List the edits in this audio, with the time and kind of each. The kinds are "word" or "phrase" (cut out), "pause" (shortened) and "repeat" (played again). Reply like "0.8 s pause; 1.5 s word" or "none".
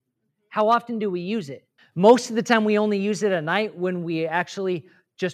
1.8 s pause